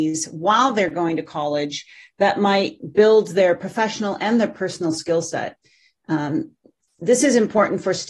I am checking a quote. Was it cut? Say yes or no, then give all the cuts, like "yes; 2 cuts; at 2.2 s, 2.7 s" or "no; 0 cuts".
no; 0 cuts